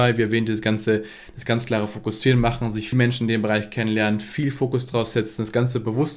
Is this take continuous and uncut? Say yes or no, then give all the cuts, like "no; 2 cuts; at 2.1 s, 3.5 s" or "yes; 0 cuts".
no; 1 cut; at 2.9 s